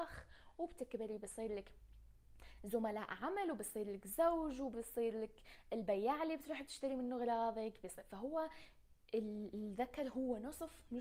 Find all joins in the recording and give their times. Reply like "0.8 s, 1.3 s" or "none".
none